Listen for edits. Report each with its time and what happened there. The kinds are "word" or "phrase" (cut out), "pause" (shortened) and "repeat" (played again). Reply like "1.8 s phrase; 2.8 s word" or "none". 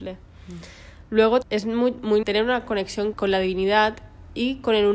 1.4 s word; 2.2 s word; 3.1 s word